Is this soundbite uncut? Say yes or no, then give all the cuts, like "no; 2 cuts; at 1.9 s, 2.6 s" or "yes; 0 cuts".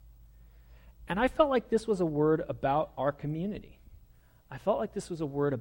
yes; 0 cuts